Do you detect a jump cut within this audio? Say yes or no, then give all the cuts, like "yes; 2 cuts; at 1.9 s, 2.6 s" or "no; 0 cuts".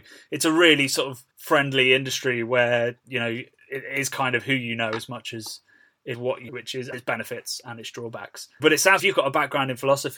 yes; 6 cuts; at 1.3 s, 6.1 s, 6.5 s, 6.9 s, 8.6 s, 9.0 s